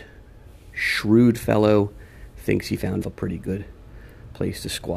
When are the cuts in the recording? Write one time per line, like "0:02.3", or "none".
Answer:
0:03.0